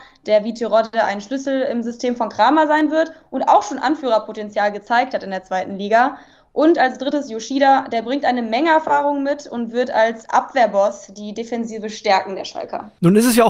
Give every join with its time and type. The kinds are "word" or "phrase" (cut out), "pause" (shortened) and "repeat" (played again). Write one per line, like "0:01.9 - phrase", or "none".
none